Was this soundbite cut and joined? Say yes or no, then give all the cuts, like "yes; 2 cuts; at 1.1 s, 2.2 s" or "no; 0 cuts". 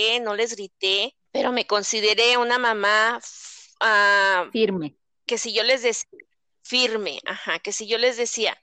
yes; 1 cut; at 1.3 s